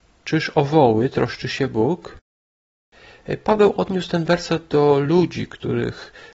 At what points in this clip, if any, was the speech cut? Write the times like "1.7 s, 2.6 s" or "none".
none